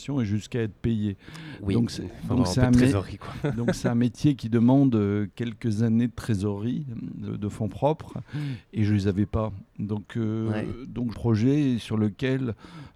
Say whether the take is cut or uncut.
cut